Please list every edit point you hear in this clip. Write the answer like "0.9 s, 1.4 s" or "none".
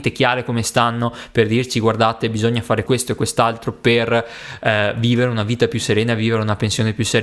2.9 s

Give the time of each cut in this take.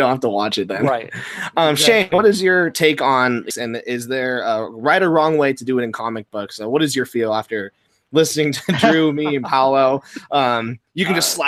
3.5 s

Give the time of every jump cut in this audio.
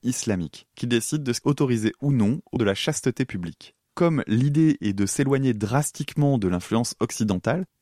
1.4 s, 2.6 s, 3.8 s

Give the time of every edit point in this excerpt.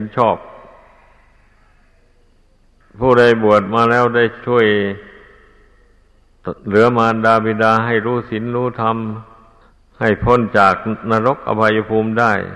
2.8 s, 6.6 s, 9.6 s

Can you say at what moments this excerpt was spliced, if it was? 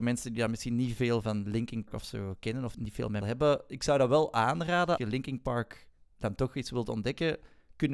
1.2 s, 1.9 s, 2.7 s, 3.2 s, 5.0 s

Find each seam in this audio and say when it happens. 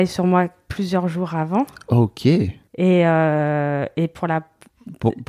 2.7 s

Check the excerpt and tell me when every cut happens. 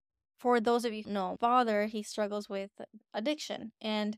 1.0 s, 1.4 s

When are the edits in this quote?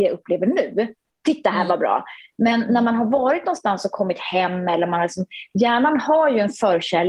none

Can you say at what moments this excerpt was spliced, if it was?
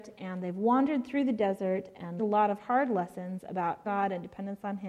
2.2 s, 3.8 s

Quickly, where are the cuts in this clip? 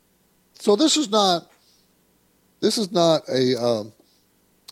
none

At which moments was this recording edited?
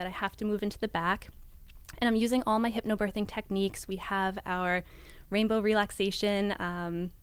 none

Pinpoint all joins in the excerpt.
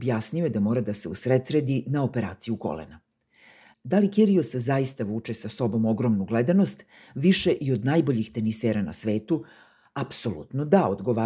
none

